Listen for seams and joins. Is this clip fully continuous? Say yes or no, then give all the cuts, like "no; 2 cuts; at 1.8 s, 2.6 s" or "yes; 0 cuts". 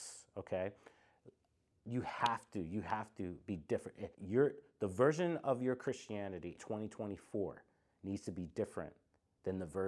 no; 2 cuts; at 4.1 s, 6.6 s